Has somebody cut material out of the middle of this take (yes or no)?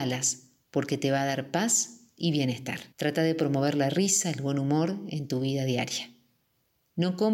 yes